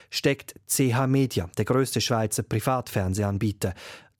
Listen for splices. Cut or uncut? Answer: uncut